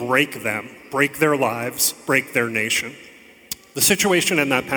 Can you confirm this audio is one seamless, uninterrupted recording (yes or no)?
yes